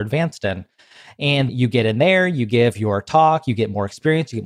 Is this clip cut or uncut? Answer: cut